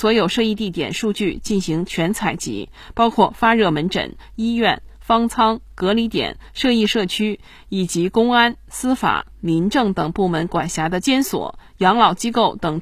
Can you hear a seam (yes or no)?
no